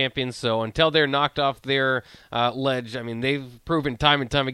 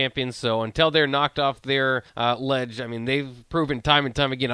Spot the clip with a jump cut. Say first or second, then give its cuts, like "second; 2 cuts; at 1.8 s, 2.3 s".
second; 1 cut; at 2.1 s